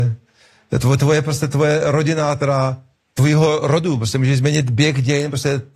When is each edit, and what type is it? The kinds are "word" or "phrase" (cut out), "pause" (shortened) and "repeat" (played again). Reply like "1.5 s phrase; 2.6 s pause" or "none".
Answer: 2.9 s pause

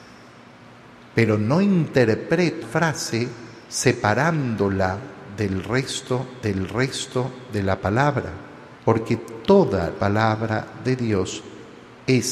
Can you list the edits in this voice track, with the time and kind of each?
2.6 s word; 3.6 s pause; 6.4 s repeat; 8.8 s pause; 10.0 s word

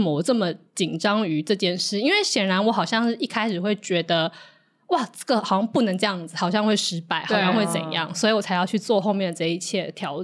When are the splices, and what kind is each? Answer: none

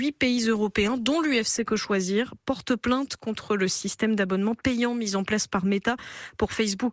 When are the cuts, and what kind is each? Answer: none

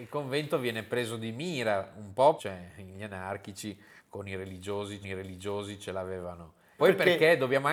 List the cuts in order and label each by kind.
2.4 s phrase; 5.0 s repeat; 6.8 s word

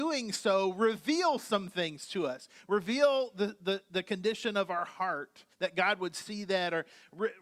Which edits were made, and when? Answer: 5.5 s pause

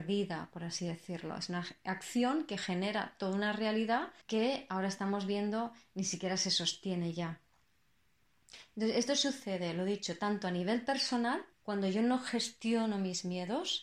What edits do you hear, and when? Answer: 4.2 s pause; 11.5 s pause

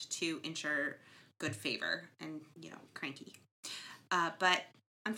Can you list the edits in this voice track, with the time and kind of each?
2.5 s phrase; 2.9 s pause

